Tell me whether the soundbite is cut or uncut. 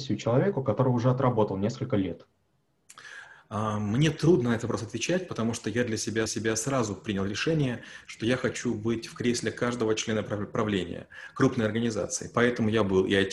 cut